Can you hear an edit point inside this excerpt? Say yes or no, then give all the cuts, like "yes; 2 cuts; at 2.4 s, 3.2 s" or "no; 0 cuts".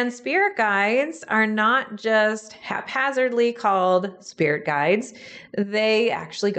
no; 0 cuts